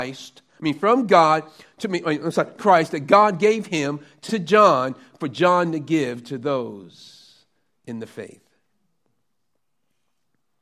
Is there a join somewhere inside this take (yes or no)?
yes